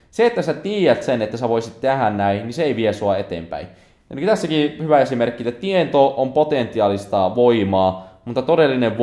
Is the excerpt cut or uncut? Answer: uncut